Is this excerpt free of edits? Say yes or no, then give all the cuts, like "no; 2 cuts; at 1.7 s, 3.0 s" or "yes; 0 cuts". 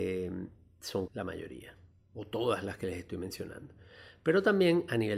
no; 2 cuts; at 1.1 s, 1.9 s